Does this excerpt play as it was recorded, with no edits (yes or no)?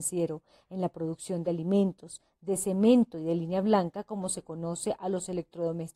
yes